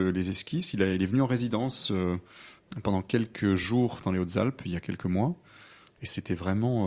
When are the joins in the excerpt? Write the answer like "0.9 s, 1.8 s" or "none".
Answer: none